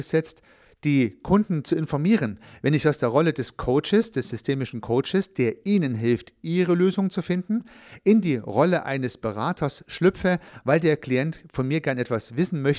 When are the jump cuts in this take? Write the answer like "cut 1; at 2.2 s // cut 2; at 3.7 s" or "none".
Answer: none